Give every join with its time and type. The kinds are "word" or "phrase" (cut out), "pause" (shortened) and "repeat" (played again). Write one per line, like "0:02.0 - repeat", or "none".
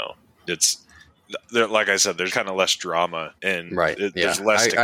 0:01.5 - word
0:02.3 - word
0:03.4 - pause